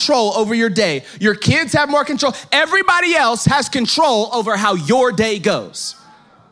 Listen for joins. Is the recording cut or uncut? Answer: uncut